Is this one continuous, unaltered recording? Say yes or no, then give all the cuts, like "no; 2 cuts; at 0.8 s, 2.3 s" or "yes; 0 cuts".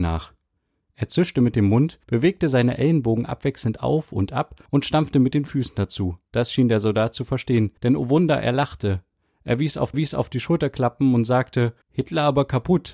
no; 6 cuts; at 2.0 s, 4.7 s, 6.3 s, 7.8 s, 9.9 s, 11.8 s